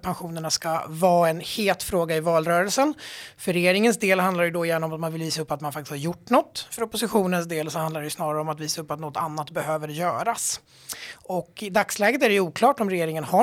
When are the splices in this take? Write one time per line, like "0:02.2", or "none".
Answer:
none